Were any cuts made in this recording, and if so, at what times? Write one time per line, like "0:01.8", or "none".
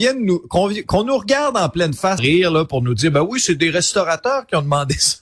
0:02.2